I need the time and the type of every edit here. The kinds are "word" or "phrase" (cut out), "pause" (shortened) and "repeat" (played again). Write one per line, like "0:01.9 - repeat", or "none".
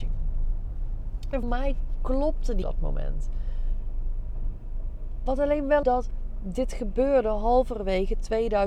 0:01.4 - word
0:02.6 - word
0:05.8 - phrase